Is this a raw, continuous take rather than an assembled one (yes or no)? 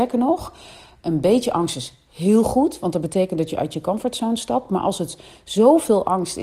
yes